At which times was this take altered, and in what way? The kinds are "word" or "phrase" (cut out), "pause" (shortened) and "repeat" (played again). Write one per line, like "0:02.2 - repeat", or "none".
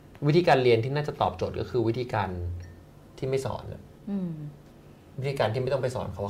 0:04.0 - pause